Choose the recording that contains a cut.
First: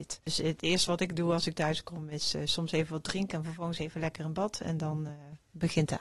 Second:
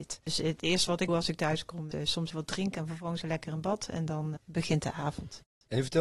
second; 5 cuts; at 1.1 s, 1.9 s, 2.3 s, 3.2 s, 4.4 s

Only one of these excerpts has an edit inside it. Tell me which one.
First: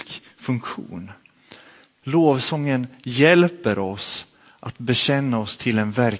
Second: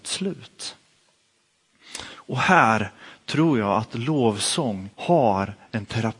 second; 1 cut; at 4.9 s

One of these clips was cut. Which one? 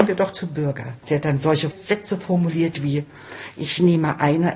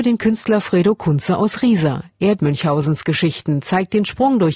second; 1 cut; at 2.4 s

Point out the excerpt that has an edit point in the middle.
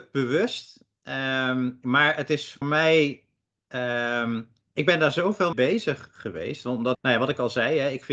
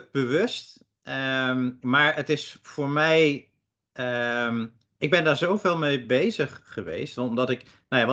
first; 3 cuts; at 2.6 s, 5.5 s, 6.9 s

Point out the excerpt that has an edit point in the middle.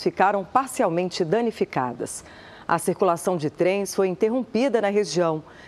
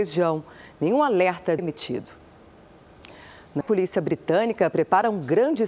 second; 2 cuts; at 1.6 s, 3.6 s

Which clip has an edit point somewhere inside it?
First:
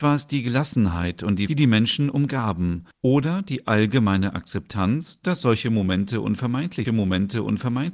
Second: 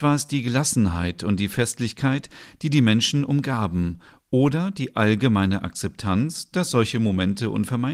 first; 3 cuts; at 1.5 s, 2.9 s, 6.8 s

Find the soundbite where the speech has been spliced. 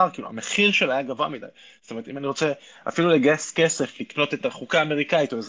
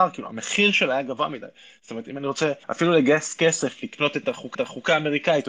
second; 2 cuts; at 2.6 s, 4.5 s

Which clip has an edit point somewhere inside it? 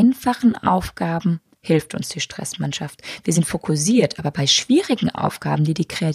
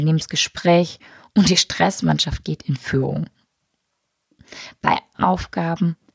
second; 1 cut; at 5.1 s

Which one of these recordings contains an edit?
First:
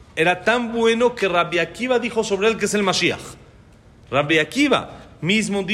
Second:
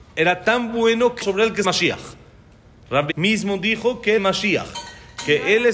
second; 4 cuts; at 1.2 s, 1.6 s, 3.1 s, 4.2 s

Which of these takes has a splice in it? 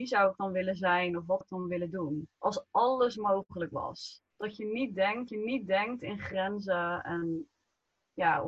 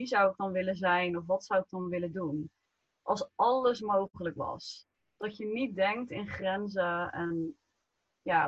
first; 4 cuts; at 1.4 s, 2.3 s, 4.3 s, 5.3 s

